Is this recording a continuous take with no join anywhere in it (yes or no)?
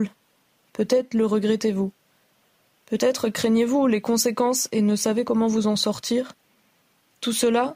yes